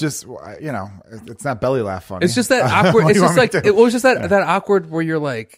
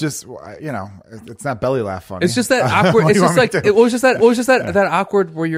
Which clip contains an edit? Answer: second; 1 cut; at 4.2 s

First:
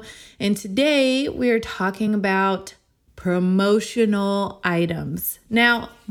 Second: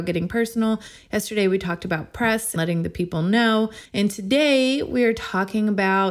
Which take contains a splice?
second; 2 cuts; at 2.6 s, 3.9 s

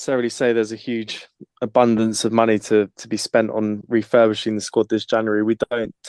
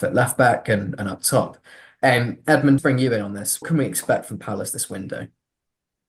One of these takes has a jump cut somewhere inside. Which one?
second; 2 cuts; at 2.8 s, 3.6 s

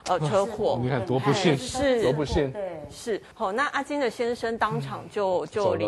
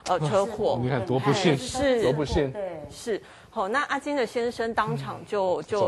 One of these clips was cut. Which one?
first; 1 cut; at 3.3 s

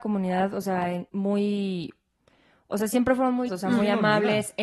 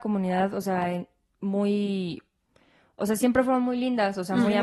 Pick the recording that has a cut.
first; 2 cuts; at 1.1 s, 3.5 s

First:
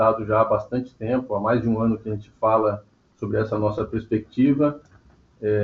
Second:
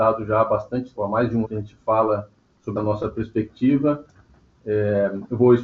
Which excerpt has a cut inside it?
second; 3 cuts; at 1.0 s, 1.4 s, 2.8 s

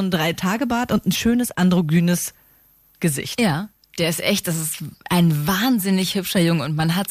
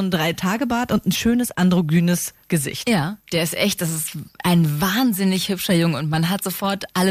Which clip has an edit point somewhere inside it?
second; 2 cuts; at 2.4 s, 3.2 s

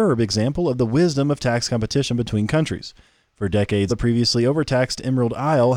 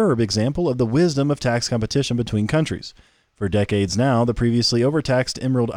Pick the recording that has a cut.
first; 1 cut; at 3.9 s

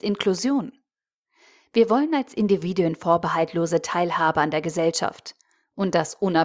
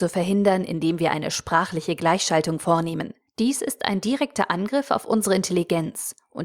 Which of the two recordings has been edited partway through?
second; 1 cut; at 3.3 s

